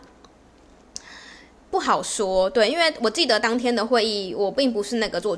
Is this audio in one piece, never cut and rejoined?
yes; 0 cuts

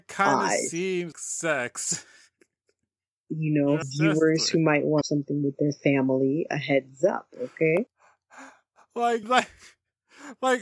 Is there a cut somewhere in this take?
yes; 4 cuts; at 1.1 s, 3.8 s, 5.0 s, 9.2 s

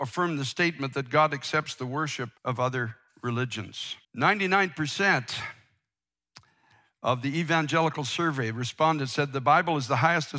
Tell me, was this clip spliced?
yes; 2 cuts; at 2.4 s, 4.0 s

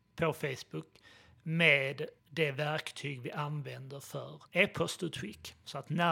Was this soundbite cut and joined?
yes; 2 cuts; at 2.2 s, 4.5 s

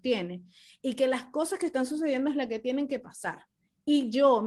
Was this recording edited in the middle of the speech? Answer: no; 0 cuts

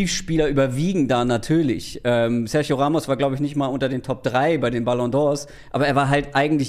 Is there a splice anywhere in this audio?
no; 0 cuts

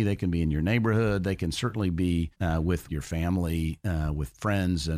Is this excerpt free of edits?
no; 2 cuts; at 2.3 s, 2.9 s

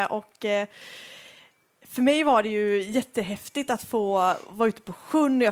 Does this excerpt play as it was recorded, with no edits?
yes; 0 cuts

